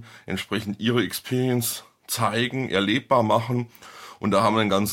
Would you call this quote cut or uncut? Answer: uncut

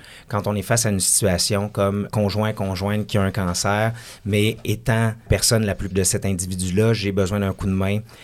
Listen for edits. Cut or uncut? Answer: cut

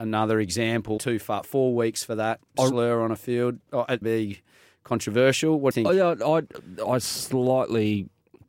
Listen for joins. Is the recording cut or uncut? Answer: cut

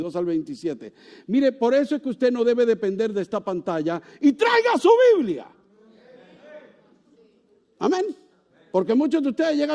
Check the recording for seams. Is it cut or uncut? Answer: uncut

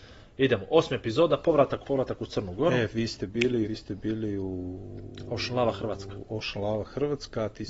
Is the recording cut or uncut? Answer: cut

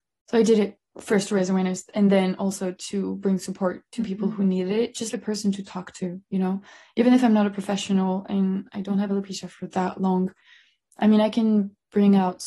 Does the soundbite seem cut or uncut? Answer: cut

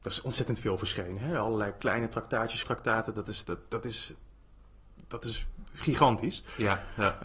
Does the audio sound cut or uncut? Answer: cut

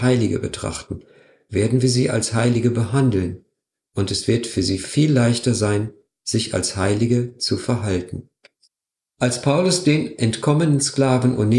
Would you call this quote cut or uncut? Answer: uncut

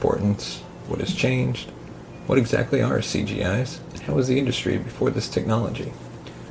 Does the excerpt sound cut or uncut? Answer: uncut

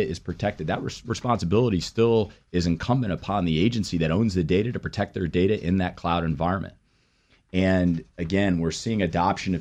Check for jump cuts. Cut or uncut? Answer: uncut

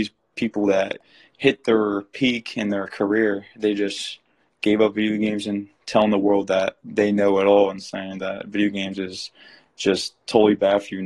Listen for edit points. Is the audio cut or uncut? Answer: uncut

